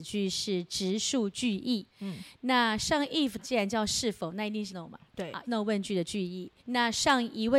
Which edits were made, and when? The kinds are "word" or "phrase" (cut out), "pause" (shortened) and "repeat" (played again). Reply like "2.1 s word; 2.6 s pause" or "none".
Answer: 1.9 s pause; 3.4 s phrase; 4.7 s word; 5.4 s word; 6.6 s pause